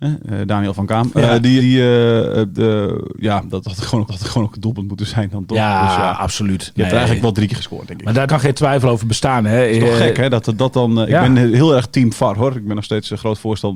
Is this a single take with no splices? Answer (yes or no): no